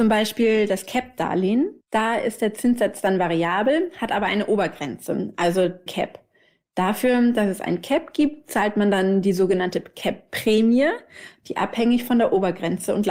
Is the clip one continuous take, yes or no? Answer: no